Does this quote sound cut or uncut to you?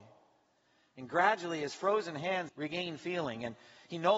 cut